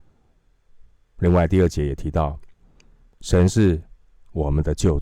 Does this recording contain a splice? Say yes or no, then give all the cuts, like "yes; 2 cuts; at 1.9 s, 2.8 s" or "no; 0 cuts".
no; 0 cuts